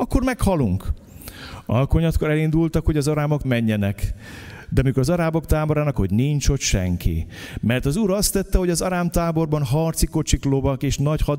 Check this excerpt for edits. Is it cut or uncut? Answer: cut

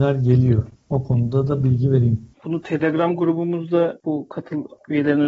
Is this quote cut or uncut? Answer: uncut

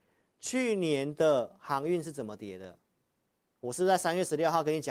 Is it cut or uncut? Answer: uncut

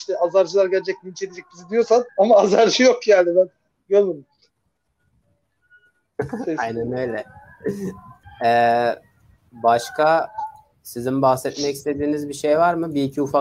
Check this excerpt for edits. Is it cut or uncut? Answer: cut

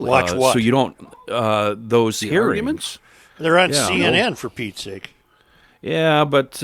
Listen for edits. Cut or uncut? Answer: uncut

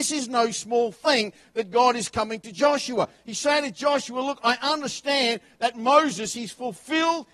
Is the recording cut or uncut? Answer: uncut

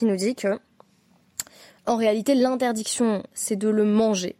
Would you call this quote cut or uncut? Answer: cut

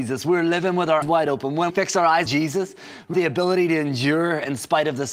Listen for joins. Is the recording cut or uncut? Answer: cut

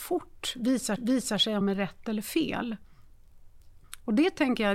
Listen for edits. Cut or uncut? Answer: cut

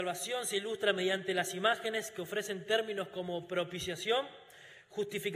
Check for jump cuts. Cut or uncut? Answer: uncut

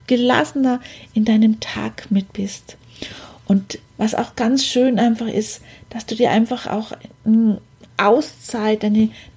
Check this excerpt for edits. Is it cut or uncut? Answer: uncut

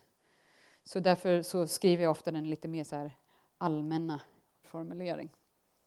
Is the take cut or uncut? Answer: cut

